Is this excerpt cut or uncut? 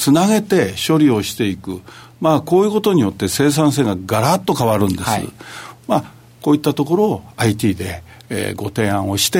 uncut